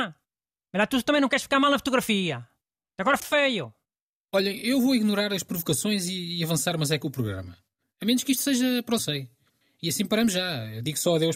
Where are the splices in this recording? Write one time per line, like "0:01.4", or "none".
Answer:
0:03.2
0:09.0